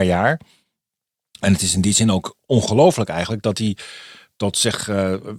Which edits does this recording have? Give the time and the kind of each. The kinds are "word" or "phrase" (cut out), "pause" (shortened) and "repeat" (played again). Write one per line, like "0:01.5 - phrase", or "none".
none